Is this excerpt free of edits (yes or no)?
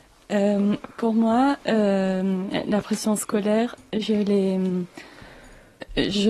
yes